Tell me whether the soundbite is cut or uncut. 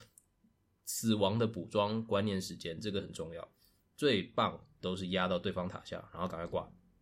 uncut